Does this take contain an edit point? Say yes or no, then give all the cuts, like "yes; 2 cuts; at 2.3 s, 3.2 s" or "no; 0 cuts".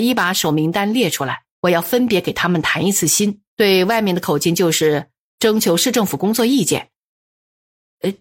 yes; 2 cuts; at 1.5 s, 3.5 s